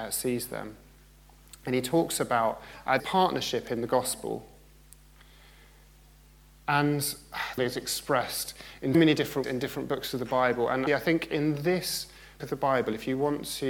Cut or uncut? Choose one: cut